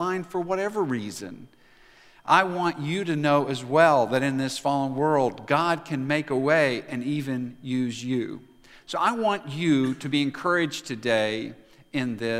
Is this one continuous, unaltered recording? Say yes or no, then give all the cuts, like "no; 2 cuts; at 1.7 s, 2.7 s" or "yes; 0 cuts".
yes; 0 cuts